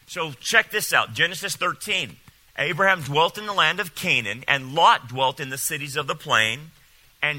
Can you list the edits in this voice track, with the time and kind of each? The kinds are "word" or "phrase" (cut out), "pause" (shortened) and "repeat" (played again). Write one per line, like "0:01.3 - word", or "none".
none